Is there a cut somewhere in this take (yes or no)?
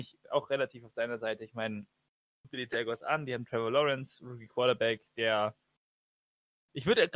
no